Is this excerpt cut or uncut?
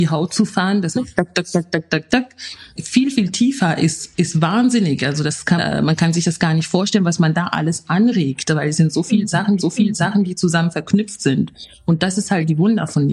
cut